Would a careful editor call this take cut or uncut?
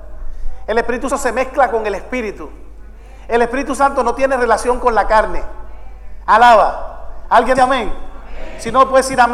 cut